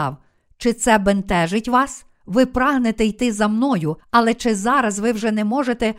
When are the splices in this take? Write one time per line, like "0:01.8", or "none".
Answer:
0:02.1
0:04.0